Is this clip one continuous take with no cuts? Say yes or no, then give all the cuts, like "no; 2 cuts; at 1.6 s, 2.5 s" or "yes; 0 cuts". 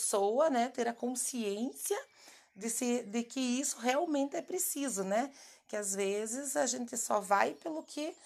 yes; 0 cuts